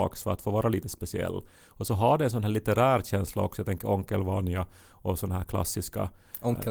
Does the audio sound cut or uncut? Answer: uncut